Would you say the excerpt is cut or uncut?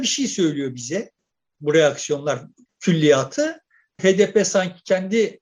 uncut